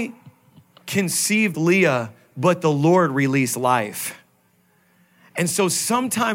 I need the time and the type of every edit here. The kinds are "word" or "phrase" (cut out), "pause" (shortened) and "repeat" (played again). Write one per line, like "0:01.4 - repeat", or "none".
0:01.5 - word